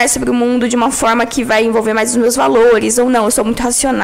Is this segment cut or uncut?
uncut